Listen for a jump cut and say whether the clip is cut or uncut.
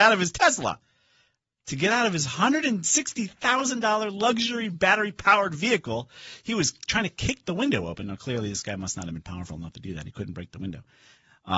uncut